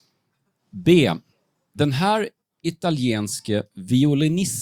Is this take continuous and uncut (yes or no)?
no